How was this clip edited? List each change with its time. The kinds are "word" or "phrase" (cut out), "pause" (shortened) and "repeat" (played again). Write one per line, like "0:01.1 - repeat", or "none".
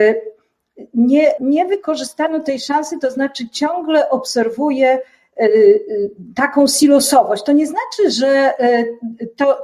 0:01.4 - word